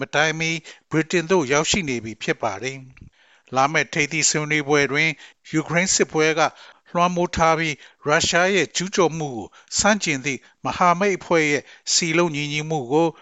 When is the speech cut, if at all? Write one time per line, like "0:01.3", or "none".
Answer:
none